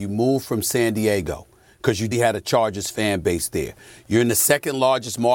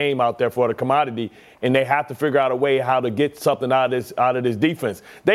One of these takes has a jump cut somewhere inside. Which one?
first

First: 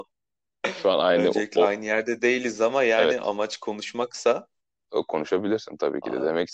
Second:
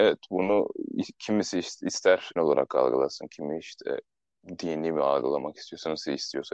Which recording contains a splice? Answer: second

